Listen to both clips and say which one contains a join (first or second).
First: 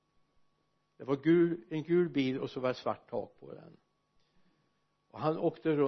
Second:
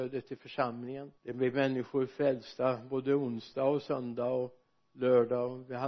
second